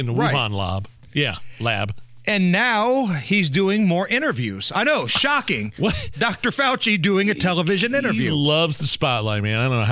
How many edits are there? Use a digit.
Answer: 0